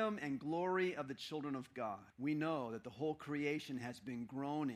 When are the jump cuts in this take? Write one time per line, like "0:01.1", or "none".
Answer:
0:02.1

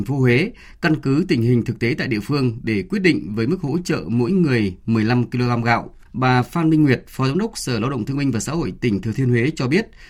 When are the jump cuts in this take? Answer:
0:06.1

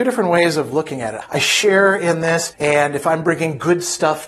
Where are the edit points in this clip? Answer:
none

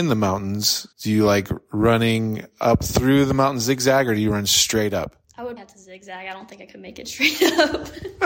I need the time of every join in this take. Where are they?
0:00.9
0:05.2
0:05.6

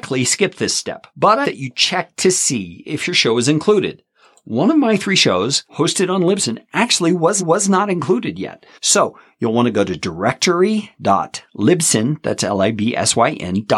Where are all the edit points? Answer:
0:01.1
0:01.4
0:05.7
0:07.4
0:08.7

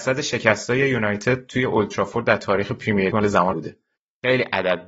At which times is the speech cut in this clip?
0:03.1
0:03.5

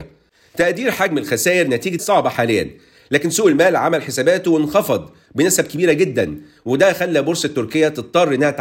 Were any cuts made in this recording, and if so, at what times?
0:02.0

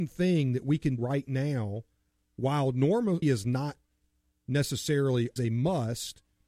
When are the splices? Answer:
0:01.0
0:03.2
0:05.4

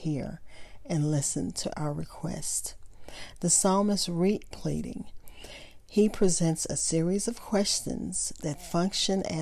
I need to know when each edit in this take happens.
0:01.7
0:04.5

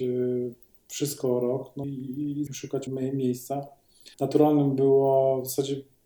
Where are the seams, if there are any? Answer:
0:01.8
0:02.5
0:02.9
0:04.1

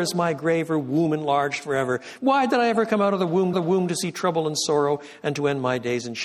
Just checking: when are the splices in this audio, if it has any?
0:03.5

